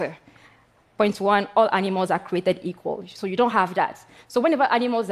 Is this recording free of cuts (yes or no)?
yes